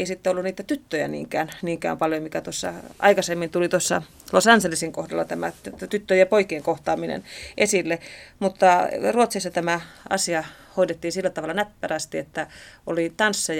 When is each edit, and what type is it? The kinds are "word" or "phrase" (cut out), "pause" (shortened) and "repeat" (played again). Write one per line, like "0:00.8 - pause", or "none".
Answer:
none